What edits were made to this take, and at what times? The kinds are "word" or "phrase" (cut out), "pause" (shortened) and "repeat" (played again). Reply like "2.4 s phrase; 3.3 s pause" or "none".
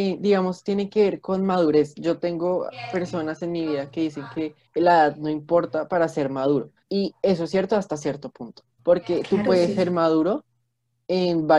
4.7 s pause; 6.8 s pause; 8.8 s pause